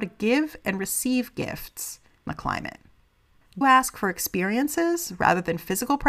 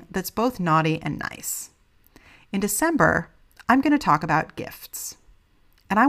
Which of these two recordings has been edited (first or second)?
first